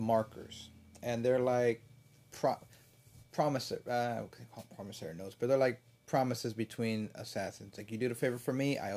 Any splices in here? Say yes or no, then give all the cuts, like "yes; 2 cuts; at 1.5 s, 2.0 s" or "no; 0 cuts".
no; 0 cuts